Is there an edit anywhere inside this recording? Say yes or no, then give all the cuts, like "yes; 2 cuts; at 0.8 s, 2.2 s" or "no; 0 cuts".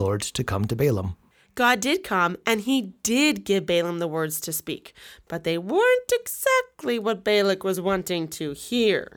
no; 0 cuts